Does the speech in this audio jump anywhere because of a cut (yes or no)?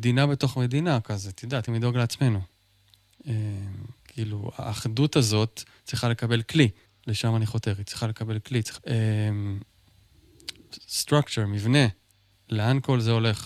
yes